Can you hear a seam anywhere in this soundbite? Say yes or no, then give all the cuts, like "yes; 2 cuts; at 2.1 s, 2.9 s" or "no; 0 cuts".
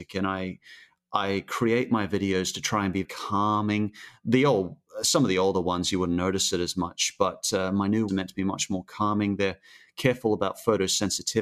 yes; 2 cuts; at 3.0 s, 8.1 s